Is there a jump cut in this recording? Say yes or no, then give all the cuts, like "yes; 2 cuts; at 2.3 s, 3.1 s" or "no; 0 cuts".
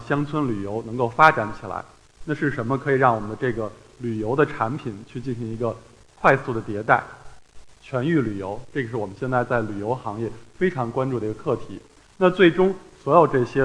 no; 0 cuts